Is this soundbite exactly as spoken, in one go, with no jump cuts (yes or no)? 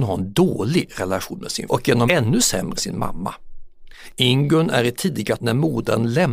no